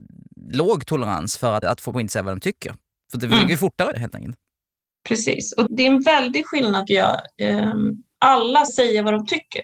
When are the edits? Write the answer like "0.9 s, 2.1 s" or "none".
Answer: 1.6 s, 1.9 s, 3.9 s, 5.7 s, 6.9 s, 8.2 s, 8.7 s